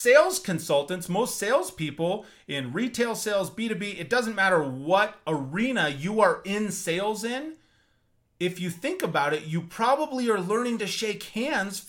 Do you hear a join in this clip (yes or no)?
no